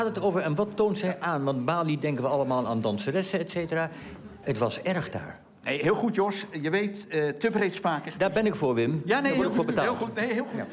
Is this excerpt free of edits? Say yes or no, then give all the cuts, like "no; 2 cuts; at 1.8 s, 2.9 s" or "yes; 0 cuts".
yes; 0 cuts